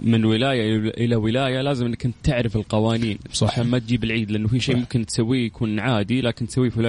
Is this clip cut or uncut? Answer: uncut